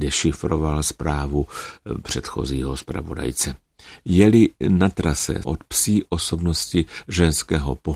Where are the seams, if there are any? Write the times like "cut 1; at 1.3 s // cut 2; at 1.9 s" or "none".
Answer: cut 1; at 5.4 s